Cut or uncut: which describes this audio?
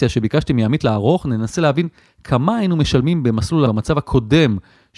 cut